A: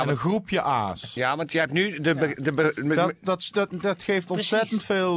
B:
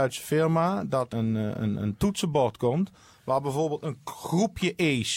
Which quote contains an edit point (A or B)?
B